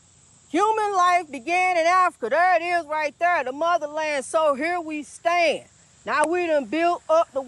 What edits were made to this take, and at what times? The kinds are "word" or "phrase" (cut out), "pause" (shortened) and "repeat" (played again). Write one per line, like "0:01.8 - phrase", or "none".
none